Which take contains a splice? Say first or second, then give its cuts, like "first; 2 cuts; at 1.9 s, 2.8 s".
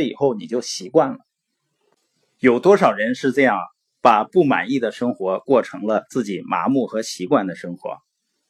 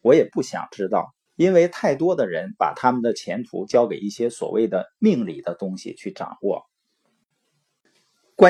second; 1 cut; at 1.3 s